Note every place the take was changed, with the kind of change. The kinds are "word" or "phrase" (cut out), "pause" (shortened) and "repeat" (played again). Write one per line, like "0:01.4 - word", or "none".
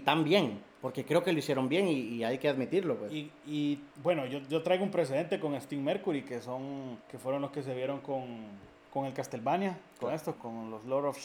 0:03.9 - pause
0:07.0 - pause
0:08.9 - pause
0:10.4 - word